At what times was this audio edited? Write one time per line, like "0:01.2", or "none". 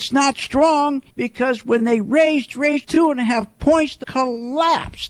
0:01.1
0:02.8
0:04.0